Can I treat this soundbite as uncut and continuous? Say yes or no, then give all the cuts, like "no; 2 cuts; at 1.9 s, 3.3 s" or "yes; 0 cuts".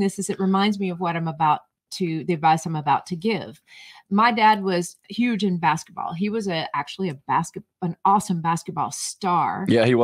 yes; 0 cuts